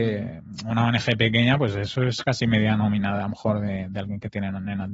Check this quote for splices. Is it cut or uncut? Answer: uncut